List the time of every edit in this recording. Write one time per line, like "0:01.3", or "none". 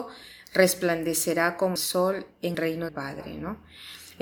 0:01.8
0:02.5
0:02.9